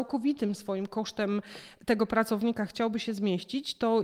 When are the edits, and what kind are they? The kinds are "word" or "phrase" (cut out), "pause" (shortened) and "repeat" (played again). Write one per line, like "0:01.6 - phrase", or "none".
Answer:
none